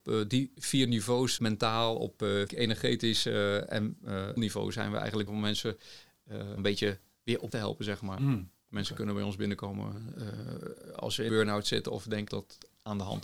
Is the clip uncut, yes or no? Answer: no